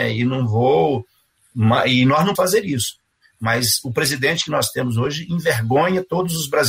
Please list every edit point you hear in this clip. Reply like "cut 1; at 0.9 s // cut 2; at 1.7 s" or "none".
cut 1; at 2.4 s